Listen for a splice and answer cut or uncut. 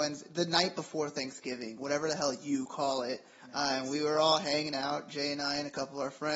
uncut